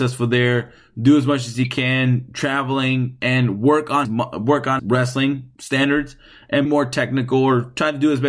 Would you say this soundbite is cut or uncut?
cut